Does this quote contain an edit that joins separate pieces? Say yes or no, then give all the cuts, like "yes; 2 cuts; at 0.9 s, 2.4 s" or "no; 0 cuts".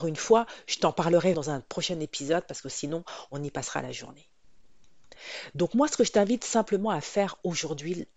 yes; 1 cut; at 1.3 s